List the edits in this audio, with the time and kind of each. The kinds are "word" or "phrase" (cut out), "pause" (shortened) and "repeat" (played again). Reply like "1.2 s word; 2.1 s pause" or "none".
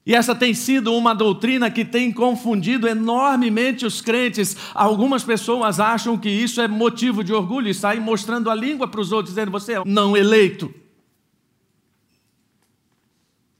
9.8 s word

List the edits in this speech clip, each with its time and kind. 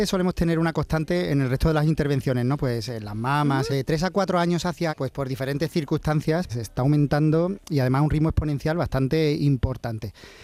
3.7 s phrase; 4.9 s word; 6.5 s word

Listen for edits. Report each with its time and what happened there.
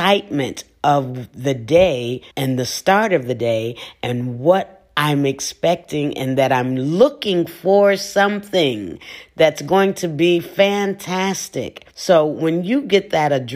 2.3 s pause; 11.9 s pause

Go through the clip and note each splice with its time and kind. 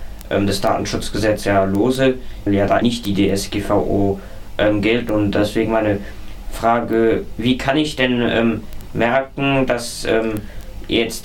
2.5 s phrase; 2.8 s word

